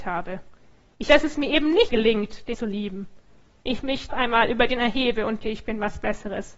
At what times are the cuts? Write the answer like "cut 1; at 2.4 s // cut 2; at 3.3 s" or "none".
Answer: cut 1; at 1.1 s // cut 2; at 1.9 s // cut 3; at 2.5 s // cut 4; at 4.1 s // cut 5; at 4.8 s // cut 6; at 5.4 s